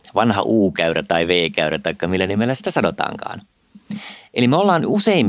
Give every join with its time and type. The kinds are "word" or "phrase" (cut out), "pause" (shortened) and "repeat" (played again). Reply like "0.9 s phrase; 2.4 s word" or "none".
none